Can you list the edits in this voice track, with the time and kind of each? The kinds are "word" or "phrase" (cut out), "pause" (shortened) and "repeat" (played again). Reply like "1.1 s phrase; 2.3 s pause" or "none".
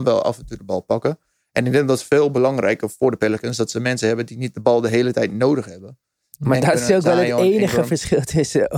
none